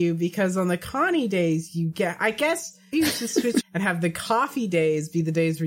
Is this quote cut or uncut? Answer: cut